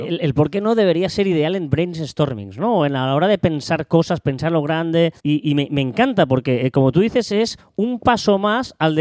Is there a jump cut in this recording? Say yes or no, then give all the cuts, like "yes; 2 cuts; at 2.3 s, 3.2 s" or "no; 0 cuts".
yes; 1 cut; at 5.2 s